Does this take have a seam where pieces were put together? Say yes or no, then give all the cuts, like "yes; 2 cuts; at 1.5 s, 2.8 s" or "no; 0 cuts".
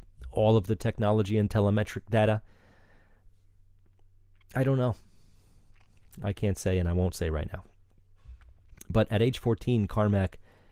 no; 0 cuts